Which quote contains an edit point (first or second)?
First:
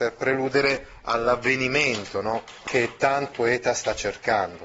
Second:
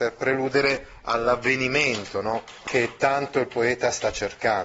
first